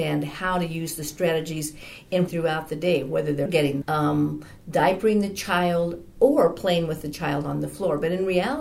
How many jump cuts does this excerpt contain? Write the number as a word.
three